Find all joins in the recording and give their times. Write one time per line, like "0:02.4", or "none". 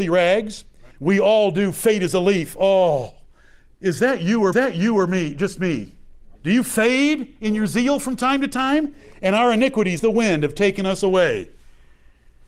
0:00.9
0:04.5
0:06.4
0:10.0

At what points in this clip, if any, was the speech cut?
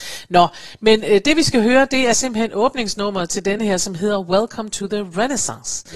none

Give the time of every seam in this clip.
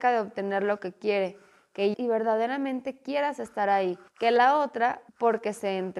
0:01.9
0:04.1
0:05.1

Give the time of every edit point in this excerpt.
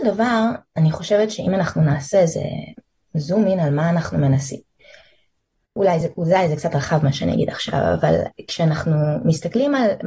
none

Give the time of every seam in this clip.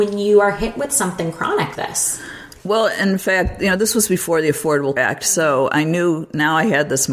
0:01.7
0:02.6
0:05.0

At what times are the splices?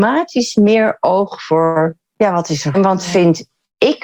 0:02.7

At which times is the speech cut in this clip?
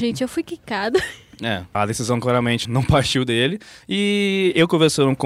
0:01.7
0:02.6

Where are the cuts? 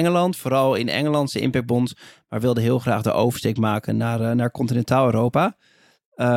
none

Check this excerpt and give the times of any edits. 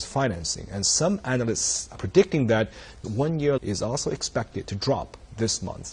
0:02.0
0:03.0
0:03.6

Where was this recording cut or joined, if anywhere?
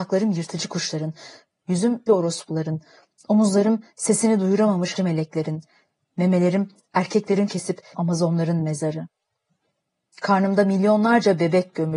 0:02.1
0:05.0
0:07.5
0:07.9

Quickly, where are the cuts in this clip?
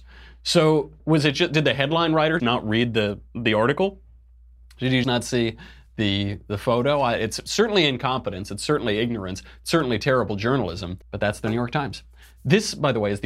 0:01.0
0:02.4
0:05.0
0:11.0

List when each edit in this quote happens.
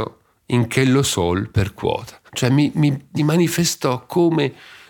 0:02.3
0:03.2

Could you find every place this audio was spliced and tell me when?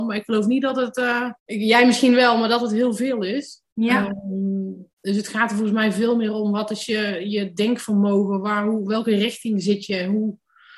0:01.4
0:04.9

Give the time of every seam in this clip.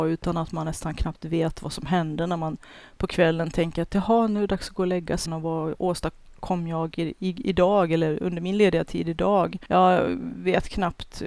0:05.3

